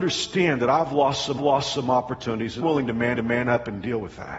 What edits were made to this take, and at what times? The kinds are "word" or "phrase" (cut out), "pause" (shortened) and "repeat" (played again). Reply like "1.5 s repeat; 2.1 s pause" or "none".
1.4 s repeat; 2.6 s word; 3.1 s repeat